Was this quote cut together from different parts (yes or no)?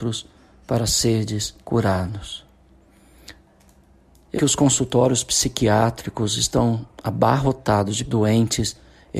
yes